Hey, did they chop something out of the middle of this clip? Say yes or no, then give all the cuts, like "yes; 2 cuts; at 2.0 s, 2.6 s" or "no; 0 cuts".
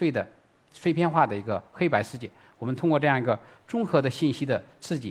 no; 0 cuts